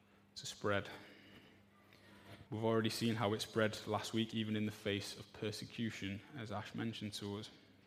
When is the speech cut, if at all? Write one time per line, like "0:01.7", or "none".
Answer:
0:02.5